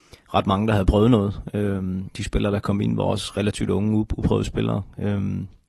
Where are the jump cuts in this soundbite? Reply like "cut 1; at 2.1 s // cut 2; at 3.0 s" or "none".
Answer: cut 1; at 2.1 s